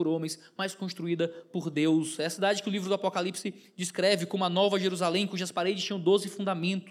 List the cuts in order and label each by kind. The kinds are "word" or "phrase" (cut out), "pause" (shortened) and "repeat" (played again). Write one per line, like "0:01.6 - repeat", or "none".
none